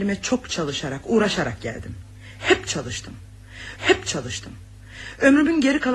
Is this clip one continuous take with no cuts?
no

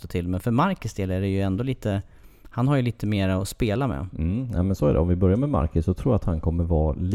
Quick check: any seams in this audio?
no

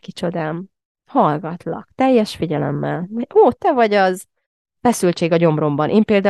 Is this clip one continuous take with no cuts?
yes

